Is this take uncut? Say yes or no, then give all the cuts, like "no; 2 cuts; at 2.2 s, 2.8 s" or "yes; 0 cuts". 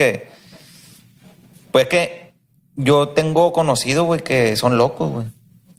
yes; 0 cuts